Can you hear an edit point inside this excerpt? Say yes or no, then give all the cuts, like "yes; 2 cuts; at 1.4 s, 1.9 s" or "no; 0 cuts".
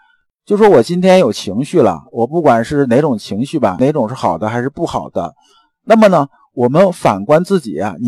no; 0 cuts